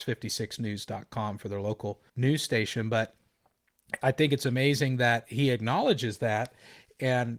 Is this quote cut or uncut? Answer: cut